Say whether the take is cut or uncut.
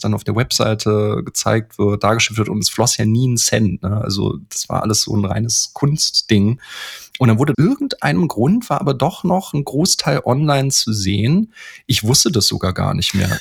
cut